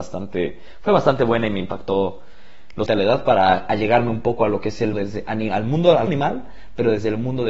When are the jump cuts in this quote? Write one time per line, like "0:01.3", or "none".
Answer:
0:02.9
0:04.9
0:06.1